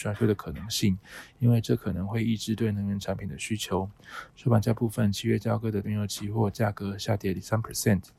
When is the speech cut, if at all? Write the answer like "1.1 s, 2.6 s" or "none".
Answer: 5.8 s